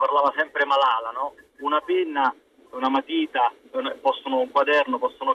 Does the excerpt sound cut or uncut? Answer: uncut